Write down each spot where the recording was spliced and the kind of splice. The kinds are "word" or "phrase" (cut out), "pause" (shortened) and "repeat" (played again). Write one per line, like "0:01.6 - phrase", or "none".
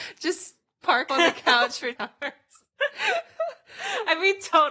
0:01.1 - word
0:02.0 - word